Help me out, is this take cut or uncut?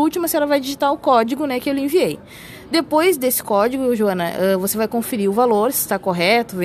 uncut